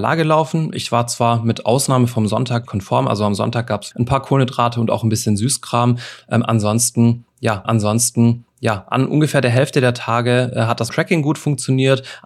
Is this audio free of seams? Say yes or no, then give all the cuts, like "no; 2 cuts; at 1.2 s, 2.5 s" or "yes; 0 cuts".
no; 4 cuts; at 2.7 s, 3.9 s, 7.6 s, 10.9 s